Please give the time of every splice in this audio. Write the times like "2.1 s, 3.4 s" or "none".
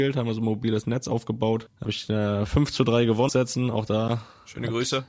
1.8 s, 3.3 s